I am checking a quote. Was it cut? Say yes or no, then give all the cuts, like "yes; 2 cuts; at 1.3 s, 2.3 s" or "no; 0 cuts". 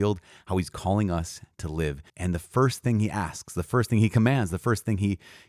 yes; 1 cut; at 2.1 s